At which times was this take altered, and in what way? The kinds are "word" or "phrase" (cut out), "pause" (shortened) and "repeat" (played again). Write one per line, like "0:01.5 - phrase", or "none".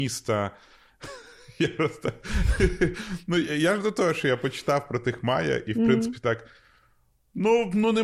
none